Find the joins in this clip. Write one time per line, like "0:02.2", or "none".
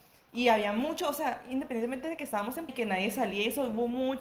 0:02.7